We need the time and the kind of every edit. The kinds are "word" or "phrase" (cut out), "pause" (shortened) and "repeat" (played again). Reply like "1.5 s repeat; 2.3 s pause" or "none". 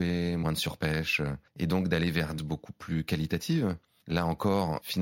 1.5 s pause; 2.4 s word